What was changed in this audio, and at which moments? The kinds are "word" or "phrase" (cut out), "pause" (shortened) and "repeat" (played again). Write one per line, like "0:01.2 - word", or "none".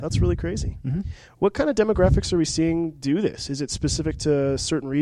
none